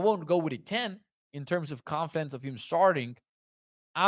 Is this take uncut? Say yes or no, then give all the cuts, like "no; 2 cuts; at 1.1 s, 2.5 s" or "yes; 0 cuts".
yes; 0 cuts